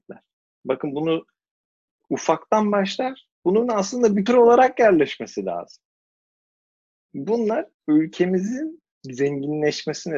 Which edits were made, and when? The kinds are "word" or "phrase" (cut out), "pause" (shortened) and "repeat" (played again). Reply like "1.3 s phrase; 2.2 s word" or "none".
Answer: 4.3 s word; 8.9 s pause